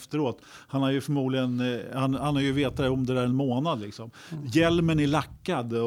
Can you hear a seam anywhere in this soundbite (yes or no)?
no